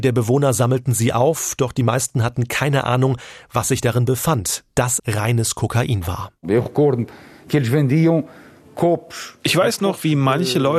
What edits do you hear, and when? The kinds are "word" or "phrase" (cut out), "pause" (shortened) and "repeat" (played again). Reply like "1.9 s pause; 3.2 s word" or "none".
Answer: 5.0 s word